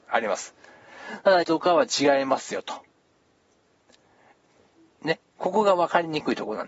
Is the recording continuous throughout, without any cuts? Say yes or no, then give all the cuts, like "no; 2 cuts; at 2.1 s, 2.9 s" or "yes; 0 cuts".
no; 1 cut; at 1.4 s